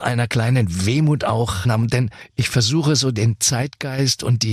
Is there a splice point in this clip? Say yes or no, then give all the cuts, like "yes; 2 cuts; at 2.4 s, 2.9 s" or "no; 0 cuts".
yes; 1 cut; at 1.6 s